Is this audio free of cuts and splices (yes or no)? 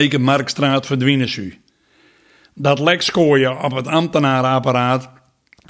yes